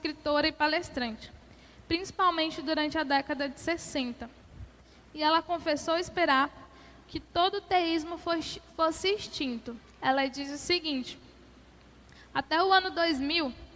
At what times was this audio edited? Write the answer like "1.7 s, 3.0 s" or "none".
none